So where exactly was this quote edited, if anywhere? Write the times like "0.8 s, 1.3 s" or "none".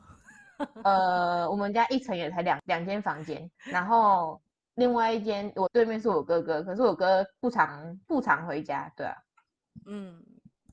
3.5 s, 4.5 s